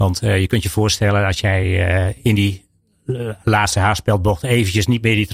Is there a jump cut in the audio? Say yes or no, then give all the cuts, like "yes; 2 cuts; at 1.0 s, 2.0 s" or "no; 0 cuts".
no; 0 cuts